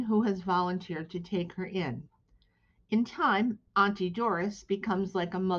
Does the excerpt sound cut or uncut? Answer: cut